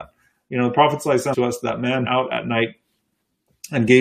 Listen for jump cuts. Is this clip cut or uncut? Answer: cut